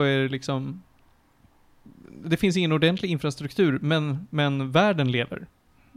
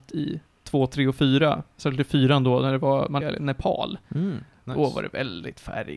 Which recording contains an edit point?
second; 2 cuts; at 3.2 s, 4.0 s

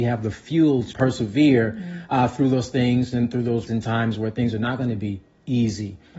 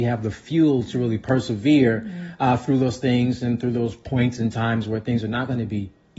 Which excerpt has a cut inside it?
first; 2 cuts; at 0.9 s, 3.7 s

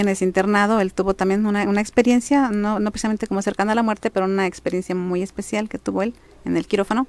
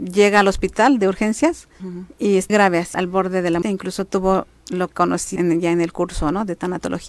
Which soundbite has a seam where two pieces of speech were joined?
second; 6 cuts; at 1.8 s, 2.5 s, 2.9 s, 3.6 s, 4.9 s, 5.4 s

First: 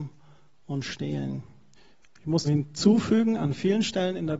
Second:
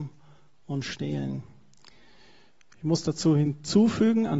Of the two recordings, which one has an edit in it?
first; 2 cuts; at 1.7 s, 2.4 s

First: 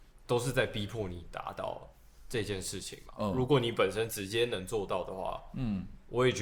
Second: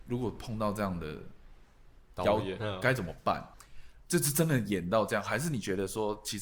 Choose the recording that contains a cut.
second; 2 cuts; at 2.6 s, 3.5 s

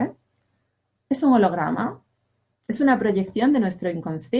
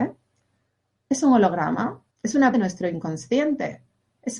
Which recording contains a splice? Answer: second; 2 cuts; at 2.1 s, 2.5 s

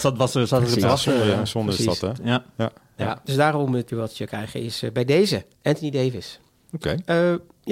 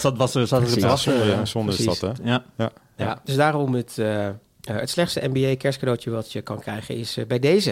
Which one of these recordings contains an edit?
first; 3 cuts; at 3.9 s, 4.3 s, 5.5 s

